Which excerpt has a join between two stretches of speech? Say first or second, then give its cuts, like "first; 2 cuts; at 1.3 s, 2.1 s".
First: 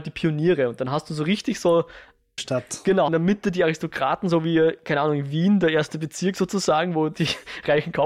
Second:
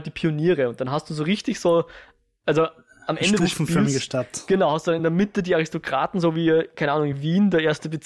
first; 2 cuts; at 2.4 s, 3.1 s